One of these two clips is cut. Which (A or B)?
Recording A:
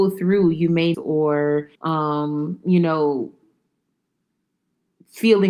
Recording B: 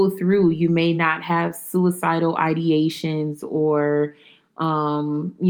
A